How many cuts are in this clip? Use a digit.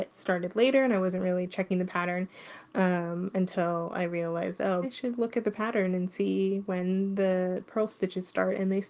1